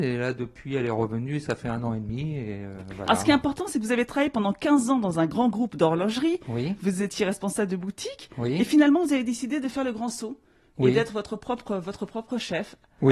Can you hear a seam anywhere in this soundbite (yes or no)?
no